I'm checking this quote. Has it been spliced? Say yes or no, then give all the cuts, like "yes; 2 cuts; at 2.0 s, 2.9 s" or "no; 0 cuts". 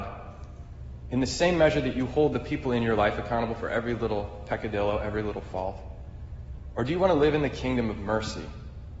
no; 0 cuts